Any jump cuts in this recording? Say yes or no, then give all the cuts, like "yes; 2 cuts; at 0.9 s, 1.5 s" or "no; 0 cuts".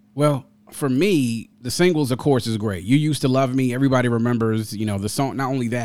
yes; 1 cut; at 1.5 s